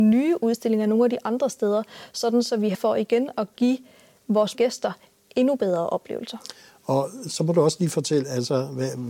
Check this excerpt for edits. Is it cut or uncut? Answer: cut